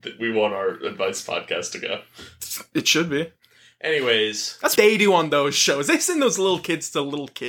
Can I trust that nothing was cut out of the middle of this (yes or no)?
no